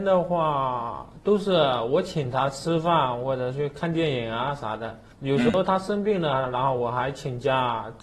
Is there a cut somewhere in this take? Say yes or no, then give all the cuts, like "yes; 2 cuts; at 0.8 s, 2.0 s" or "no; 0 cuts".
yes; 1 cut; at 5.1 s